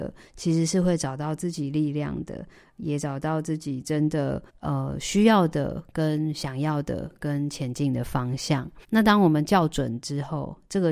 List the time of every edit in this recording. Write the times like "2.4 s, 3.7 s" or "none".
4.5 s, 8.8 s